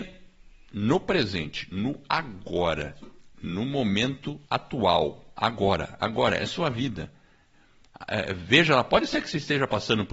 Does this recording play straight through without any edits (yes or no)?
no